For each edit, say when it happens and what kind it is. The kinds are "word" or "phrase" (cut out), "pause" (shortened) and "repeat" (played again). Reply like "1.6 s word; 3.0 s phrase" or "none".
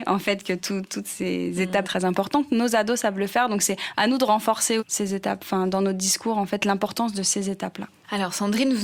1.8 s phrase; 4.8 s phrase